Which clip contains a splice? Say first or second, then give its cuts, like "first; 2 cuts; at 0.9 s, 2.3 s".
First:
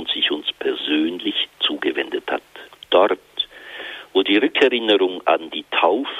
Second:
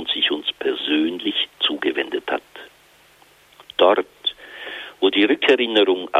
first; 1 cut; at 2.7 s